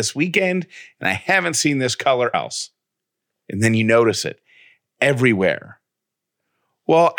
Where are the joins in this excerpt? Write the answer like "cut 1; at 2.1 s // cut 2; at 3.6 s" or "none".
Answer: cut 1; at 2.3 s

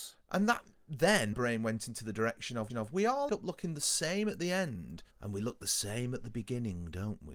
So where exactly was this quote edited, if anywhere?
cut 1; at 1.3 s // cut 2; at 2.7 s // cut 3; at 3.3 s // cut 4; at 5.1 s

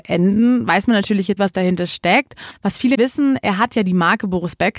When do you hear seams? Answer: cut 1; at 1.4 s // cut 2; at 2.9 s

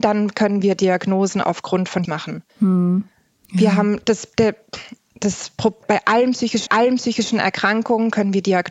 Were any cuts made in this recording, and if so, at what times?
cut 1; at 2.0 s // cut 2; at 2.5 s // cut 3; at 5.8 s // cut 4; at 6.7 s

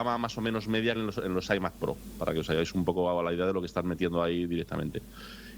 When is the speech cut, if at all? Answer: cut 1; at 0.9 s

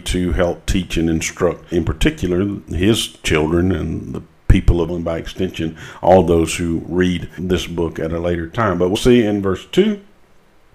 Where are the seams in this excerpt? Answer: cut 1; at 1.7 s // cut 2; at 4.9 s // cut 3; at 7.4 s // cut 4; at 8.9 s

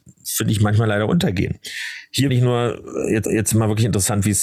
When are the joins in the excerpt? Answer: cut 1; at 2.3 s // cut 2; at 3.2 s

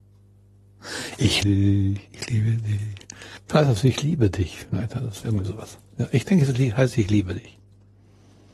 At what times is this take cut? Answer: cut 1; at 1.4 s

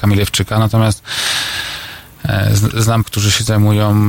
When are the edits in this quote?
cut 1; at 3.0 s

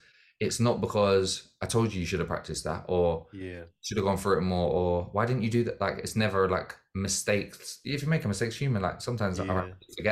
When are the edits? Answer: none

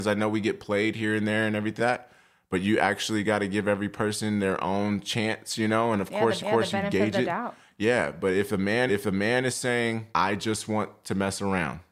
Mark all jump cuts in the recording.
cut 1; at 1.8 s // cut 2; at 6.4 s // cut 3; at 8.9 s // cut 4; at 10.1 s

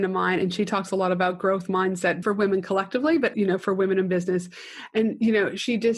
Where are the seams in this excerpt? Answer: cut 1; at 2.2 s // cut 2; at 3.3 s

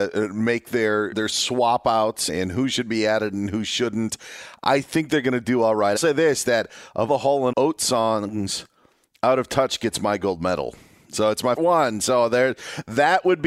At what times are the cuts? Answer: cut 1; at 1.1 s // cut 2; at 2.3 s // cut 3; at 6.0 s // cut 4; at 7.1 s // cut 5; at 7.5 s // cut 6; at 11.6 s

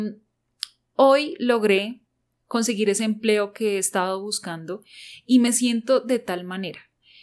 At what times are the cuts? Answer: none

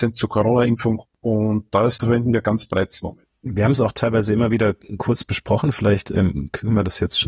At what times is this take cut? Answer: cut 1; at 2.0 s

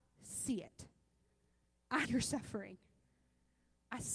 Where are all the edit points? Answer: cut 1; at 2.0 s

